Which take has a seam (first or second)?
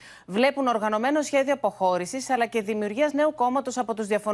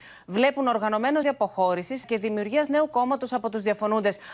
second